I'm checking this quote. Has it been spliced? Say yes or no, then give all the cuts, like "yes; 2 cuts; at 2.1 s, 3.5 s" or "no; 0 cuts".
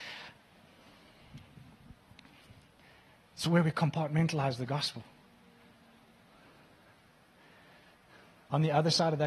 no; 0 cuts